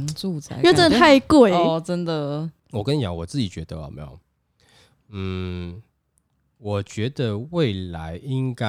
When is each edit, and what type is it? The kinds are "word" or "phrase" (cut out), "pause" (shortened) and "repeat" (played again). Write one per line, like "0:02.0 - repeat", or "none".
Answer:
0:02.6 - pause